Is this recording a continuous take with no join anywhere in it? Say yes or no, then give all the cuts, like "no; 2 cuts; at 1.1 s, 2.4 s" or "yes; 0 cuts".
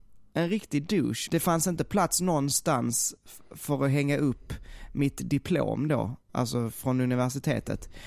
no; 1 cut; at 1.3 s